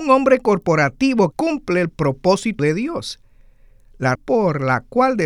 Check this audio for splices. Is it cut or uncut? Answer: cut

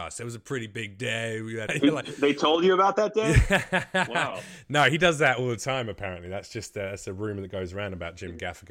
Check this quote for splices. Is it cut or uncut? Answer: cut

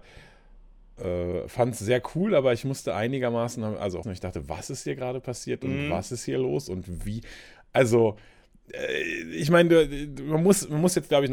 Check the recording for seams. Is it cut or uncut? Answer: cut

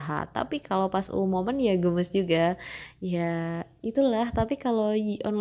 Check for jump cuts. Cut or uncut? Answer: uncut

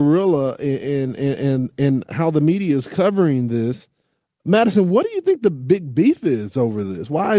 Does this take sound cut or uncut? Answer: uncut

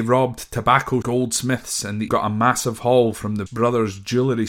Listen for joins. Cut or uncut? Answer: cut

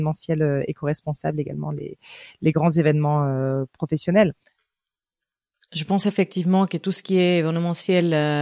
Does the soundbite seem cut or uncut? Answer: uncut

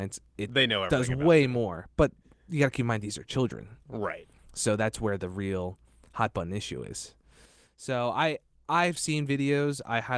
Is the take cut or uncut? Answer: uncut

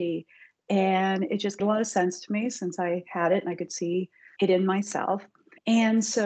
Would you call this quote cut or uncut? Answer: cut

